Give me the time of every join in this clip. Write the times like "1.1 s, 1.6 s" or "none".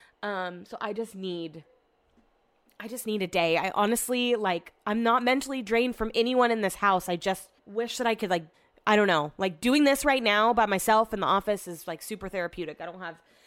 7.6 s, 8.5 s